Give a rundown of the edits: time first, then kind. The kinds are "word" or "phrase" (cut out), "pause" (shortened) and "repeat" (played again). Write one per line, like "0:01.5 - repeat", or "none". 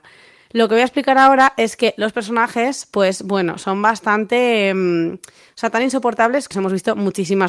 0:06.5 - phrase